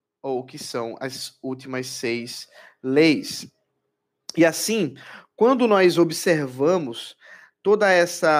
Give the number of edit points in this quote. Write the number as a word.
zero